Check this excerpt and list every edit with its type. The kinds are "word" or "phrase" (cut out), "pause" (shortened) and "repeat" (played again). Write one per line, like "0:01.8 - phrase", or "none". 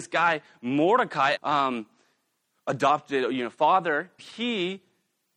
0:01.3 - word
0:04.2 - word